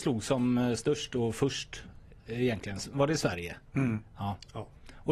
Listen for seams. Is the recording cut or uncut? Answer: uncut